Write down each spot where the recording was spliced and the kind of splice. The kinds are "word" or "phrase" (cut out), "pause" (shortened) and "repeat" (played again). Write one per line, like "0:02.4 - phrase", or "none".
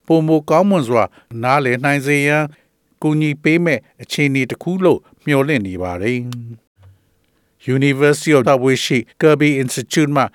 0:08.4 - word
0:09.1 - pause